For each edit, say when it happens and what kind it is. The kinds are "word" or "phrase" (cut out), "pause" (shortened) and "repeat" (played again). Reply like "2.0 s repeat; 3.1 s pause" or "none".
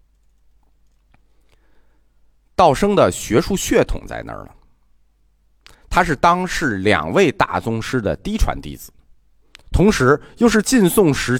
none